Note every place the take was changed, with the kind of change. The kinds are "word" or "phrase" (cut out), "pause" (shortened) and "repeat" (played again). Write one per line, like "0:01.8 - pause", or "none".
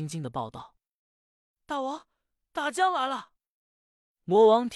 none